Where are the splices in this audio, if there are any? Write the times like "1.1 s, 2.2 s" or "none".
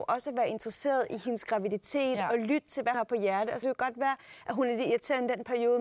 2.9 s, 3.6 s